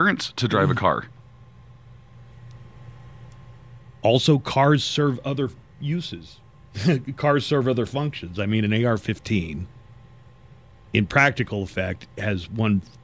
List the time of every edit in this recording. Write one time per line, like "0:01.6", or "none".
none